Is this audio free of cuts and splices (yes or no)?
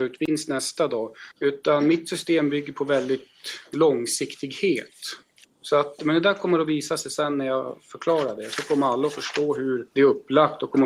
no